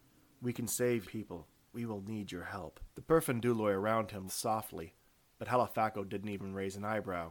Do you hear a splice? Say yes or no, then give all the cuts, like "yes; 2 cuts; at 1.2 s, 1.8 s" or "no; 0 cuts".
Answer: yes; 4 cuts; at 1.0 s, 1.7 s, 2.9 s, 4.3 s